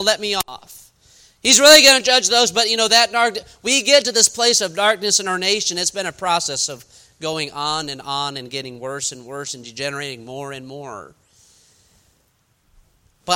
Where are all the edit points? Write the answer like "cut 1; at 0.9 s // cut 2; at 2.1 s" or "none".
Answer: none